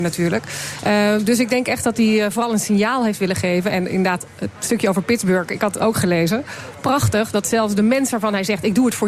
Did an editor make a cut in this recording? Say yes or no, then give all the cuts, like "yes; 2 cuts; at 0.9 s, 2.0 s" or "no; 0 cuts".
no; 0 cuts